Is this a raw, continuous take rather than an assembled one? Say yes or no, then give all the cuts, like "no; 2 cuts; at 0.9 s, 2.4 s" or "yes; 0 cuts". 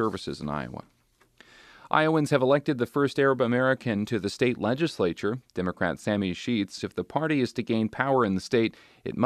no; 1 cut; at 6.8 s